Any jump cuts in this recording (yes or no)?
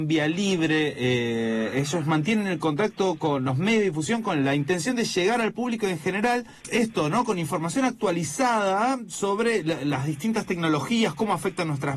yes